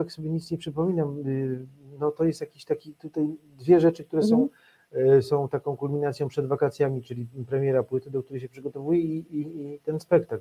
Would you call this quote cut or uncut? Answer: uncut